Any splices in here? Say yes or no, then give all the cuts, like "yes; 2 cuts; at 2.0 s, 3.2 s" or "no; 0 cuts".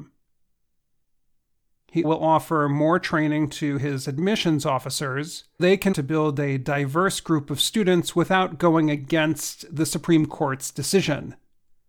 yes; 3 cuts; at 2.0 s, 5.6 s, 5.9 s